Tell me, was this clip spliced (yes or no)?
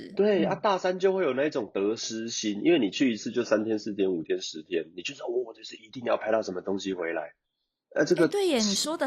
no